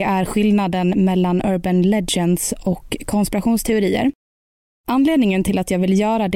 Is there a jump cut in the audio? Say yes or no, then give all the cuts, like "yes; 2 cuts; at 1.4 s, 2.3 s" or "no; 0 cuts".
no; 0 cuts